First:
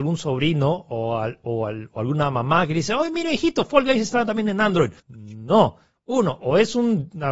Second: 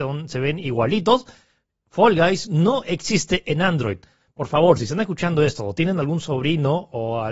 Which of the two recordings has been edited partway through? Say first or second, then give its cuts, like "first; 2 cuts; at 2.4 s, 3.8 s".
first; 1 cut; at 5.0 s